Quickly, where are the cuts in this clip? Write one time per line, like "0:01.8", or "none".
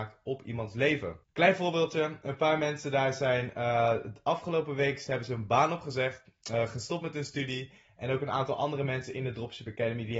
0:01.2

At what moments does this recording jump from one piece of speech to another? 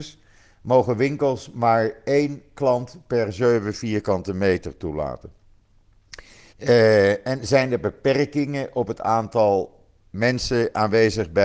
0:06.5

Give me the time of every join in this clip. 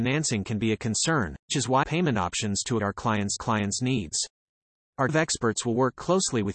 0:01.5
0:01.8
0:02.8
0:03.4
0:05.1

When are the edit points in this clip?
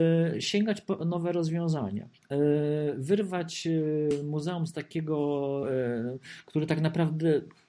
0:05.6

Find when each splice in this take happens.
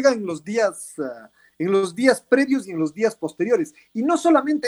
none

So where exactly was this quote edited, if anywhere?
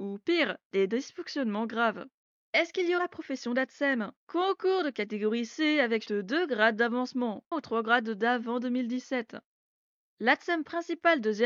0:02.3
0:03.0
0:04.2
0:06.1
0:07.5

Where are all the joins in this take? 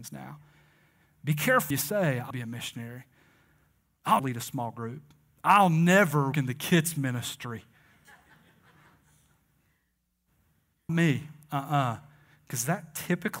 0:01.7
0:02.3
0:04.2
0:06.3
0:10.9

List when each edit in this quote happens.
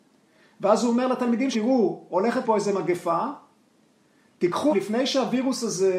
0:01.5
0:02.4
0:04.7

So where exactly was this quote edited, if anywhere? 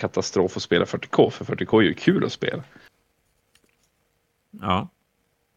none

